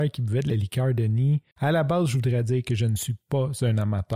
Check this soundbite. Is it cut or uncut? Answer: cut